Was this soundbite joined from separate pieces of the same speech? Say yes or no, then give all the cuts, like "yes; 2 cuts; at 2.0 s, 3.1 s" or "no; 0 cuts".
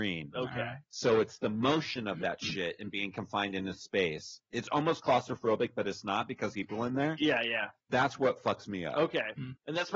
yes; 1 cut; at 6.5 s